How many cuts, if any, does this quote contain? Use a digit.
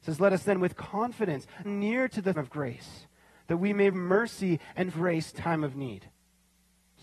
5